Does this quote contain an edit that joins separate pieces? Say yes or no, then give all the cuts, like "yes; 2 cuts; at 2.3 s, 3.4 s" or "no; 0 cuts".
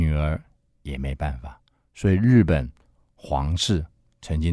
no; 0 cuts